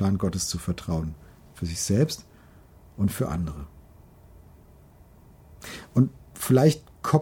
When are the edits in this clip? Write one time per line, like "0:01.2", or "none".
none